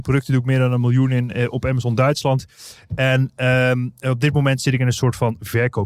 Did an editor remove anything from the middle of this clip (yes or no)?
no